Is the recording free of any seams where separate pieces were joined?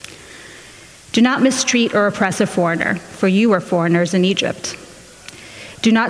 yes; 0 cuts

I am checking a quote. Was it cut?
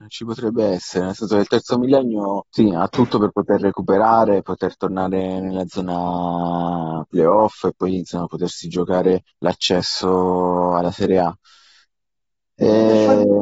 yes; 2 cuts; at 2.5 s, 9.3 s

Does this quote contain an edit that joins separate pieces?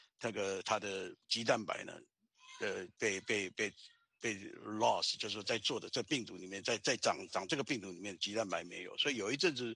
no; 0 cuts

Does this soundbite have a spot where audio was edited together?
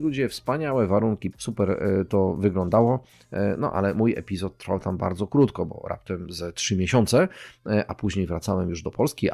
yes; 1 cut; at 1.3 s

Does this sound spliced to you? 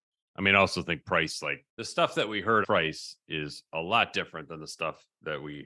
yes; 2 cuts; at 1.7 s, 2.6 s

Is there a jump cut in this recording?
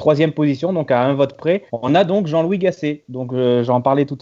yes; 1 cut; at 1.7 s

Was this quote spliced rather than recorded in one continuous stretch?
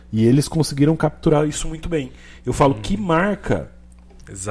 no; 0 cuts

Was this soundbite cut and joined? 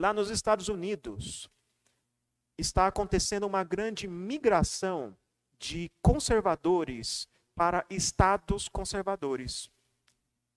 no; 0 cuts

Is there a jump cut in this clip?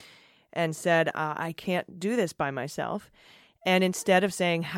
no; 0 cuts

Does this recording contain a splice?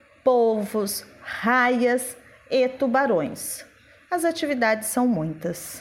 no; 0 cuts

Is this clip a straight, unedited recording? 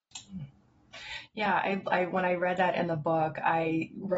yes; 0 cuts

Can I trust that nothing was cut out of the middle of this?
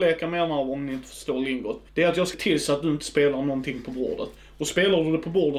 no; 2 cuts; at 1.9 s, 2.3 s

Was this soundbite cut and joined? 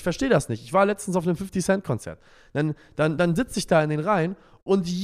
no; 0 cuts

